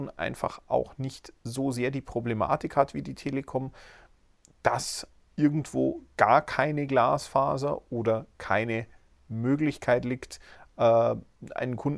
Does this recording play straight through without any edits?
yes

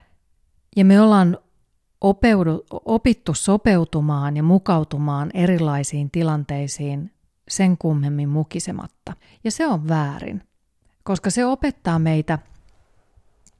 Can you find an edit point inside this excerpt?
yes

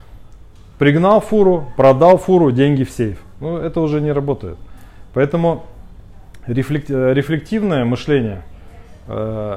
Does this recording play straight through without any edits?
yes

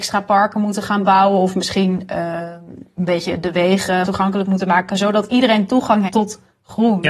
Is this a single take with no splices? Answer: no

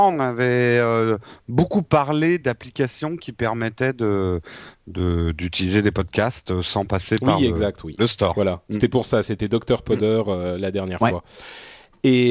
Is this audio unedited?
yes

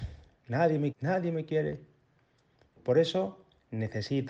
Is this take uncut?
no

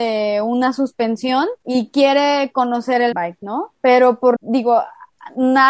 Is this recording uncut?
no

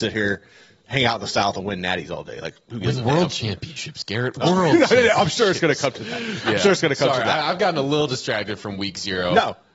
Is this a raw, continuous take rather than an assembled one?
yes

